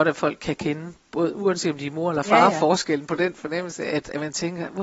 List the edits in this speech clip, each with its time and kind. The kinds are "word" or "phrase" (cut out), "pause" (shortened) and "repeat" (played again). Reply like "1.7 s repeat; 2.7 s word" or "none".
none